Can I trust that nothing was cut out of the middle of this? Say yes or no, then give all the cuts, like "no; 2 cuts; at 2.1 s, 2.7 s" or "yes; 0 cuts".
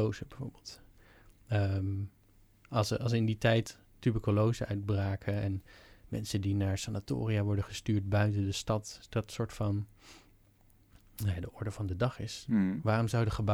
yes; 0 cuts